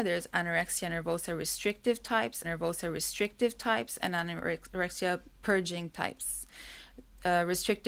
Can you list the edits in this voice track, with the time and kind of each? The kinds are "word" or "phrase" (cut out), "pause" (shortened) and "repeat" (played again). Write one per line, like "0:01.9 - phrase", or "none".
0:02.4 - repeat